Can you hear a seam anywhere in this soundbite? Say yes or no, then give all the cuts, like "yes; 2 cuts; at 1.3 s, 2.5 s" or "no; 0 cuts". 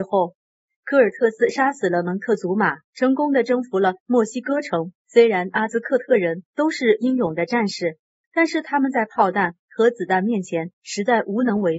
yes; 2 cuts; at 2.8 s, 5.0 s